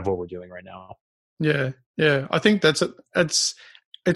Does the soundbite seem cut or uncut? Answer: uncut